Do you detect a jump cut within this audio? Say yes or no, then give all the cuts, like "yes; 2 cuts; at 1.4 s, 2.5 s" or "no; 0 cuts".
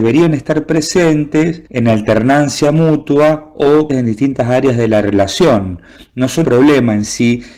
yes; 3 cuts; at 1.7 s, 3.9 s, 6.4 s